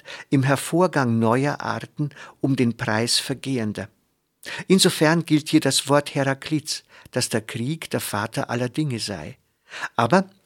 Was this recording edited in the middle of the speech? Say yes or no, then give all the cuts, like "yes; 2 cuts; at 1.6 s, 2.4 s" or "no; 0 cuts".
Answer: no; 0 cuts